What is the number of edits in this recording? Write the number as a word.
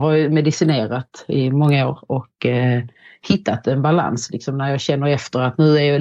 zero